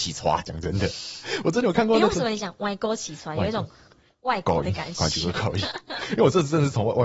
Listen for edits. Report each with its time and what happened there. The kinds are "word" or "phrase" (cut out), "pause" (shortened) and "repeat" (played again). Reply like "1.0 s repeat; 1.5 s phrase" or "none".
none